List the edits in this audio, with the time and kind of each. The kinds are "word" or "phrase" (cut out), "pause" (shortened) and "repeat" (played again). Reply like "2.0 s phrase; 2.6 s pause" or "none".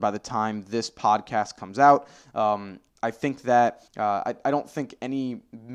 2.9 s pause; 3.9 s pause